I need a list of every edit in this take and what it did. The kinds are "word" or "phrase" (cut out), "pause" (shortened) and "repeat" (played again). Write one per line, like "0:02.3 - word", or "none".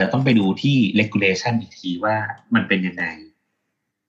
none